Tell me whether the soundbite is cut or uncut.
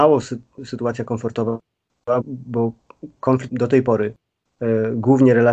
cut